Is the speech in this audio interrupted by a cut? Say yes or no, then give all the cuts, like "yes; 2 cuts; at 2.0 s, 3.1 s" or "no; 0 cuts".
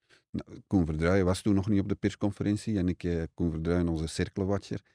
no; 0 cuts